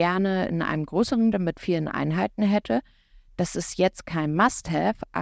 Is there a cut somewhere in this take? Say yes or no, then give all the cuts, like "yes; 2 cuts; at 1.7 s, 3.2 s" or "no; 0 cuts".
yes; 1 cut; at 1.3 s